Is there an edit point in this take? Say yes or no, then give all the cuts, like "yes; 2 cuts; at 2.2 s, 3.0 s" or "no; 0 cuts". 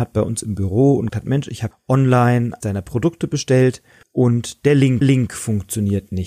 yes; 5 cuts; at 1.1 s, 1.7 s, 2.6 s, 4.0 s, 5.0 s